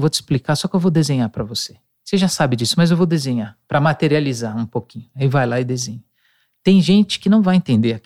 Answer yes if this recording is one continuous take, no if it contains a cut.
yes